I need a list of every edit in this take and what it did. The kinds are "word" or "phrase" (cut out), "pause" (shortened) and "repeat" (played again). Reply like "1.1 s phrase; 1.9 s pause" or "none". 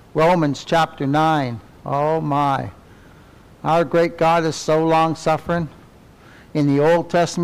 none